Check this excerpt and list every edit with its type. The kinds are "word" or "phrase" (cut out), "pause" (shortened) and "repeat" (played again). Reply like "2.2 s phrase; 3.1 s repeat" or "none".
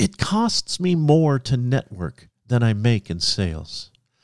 none